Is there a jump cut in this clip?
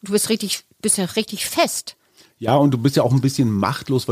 no; 0 cuts

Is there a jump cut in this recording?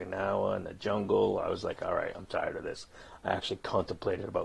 no; 0 cuts

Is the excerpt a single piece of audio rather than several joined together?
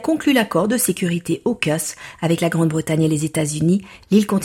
yes; 0 cuts

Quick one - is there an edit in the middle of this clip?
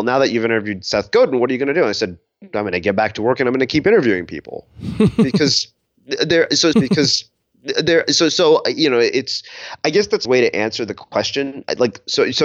yes; 2 cuts; at 6.7 s, 10.2 s

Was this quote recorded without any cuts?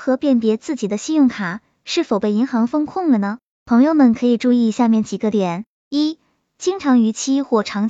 yes; 0 cuts

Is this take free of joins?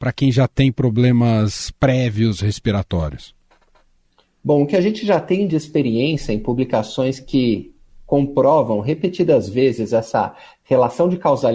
yes; 0 cuts

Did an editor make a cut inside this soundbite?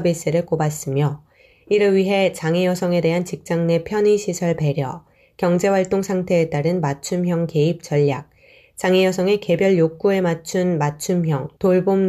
no; 0 cuts

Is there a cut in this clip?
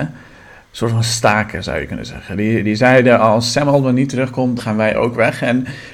yes; 1 cut; at 4.6 s

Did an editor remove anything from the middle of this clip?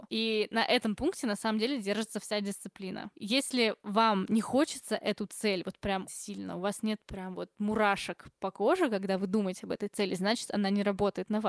yes; 1 cut; at 6.1 s

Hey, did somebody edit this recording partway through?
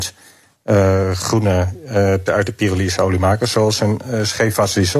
yes; 1 cut; at 2.3 s

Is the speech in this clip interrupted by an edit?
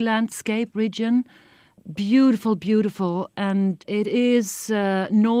no; 0 cuts

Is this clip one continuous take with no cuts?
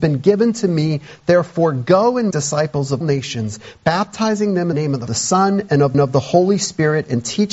no; 5 cuts; at 2.3 s, 3.0 s, 4.7 s, 5.1 s, 5.9 s

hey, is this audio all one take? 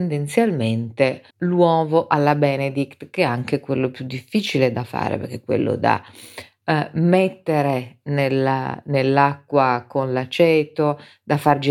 no; 1 cut; at 1.3 s

